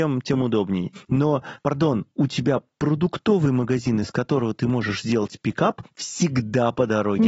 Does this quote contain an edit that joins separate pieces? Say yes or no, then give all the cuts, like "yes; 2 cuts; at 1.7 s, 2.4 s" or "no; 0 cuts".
no; 0 cuts